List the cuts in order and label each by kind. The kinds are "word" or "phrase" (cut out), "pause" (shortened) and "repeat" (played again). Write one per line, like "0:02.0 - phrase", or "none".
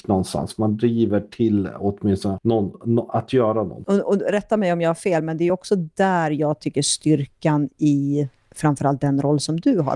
none